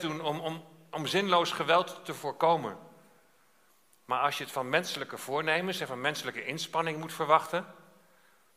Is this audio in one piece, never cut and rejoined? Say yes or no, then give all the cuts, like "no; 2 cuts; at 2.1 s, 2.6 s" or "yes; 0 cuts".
yes; 0 cuts